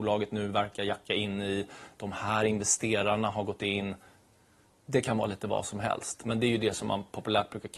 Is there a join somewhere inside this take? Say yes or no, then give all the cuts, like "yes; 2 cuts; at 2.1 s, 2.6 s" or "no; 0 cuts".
no; 0 cuts